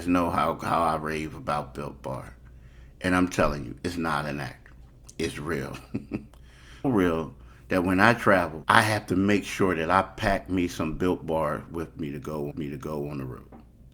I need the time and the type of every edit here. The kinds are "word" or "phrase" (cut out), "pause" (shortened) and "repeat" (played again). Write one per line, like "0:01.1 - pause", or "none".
0:06.8 - word
0:08.6 - word
0:12.5 - repeat